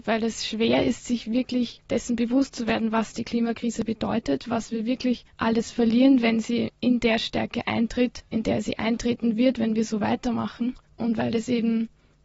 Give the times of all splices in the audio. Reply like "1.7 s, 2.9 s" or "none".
none